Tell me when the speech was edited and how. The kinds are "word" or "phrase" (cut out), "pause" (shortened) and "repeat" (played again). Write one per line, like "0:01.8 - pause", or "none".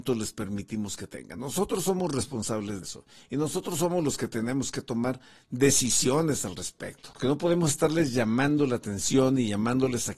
0:02.8 - word

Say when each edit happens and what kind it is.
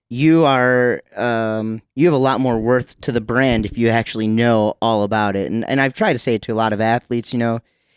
0:01.9 - pause

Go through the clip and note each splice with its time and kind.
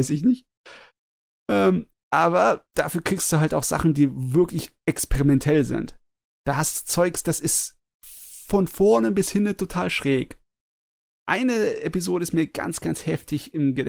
none

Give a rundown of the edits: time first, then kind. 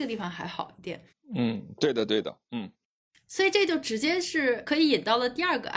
none

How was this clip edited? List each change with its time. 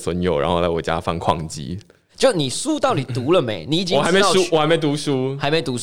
none

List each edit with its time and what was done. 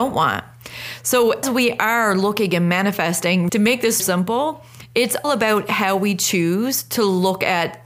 0:01.4 - word
0:03.5 - word
0:04.0 - word
0:05.2 - word

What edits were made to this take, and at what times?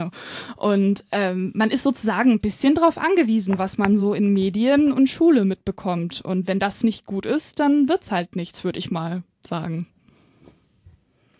none

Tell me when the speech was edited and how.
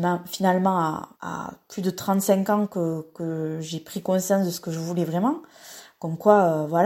0:01.1 - pause

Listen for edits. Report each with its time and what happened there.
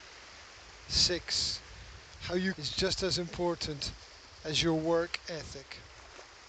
0:02.5 - word

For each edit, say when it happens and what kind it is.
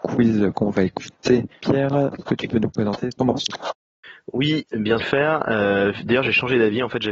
0:02.3 - word
0:03.2 - phrase
0:05.0 - phrase

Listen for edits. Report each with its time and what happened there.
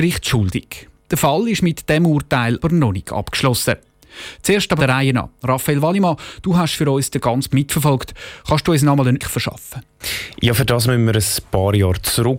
0:02.6 - word
0:04.8 - word
0:07.5 - word
0:09.2 - word

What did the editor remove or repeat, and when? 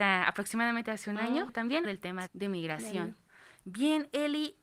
0:01.5 - word
0:01.8 - word
0:02.3 - word

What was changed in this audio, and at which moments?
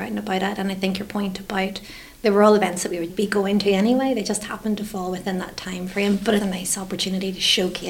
0:03.1 - word
0:06.4 - word

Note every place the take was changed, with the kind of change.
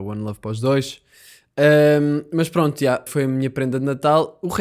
0:03.1 - word

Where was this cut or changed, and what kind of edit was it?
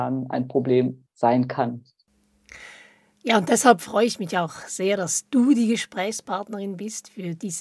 none

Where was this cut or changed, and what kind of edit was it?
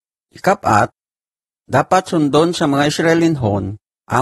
none

